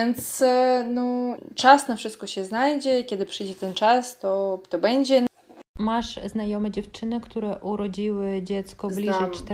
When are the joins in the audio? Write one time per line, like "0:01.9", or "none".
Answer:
0:05.7